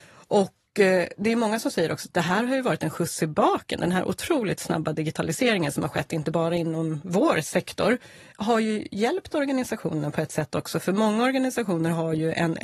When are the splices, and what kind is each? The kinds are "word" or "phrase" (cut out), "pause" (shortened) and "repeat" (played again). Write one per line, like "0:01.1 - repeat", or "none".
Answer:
none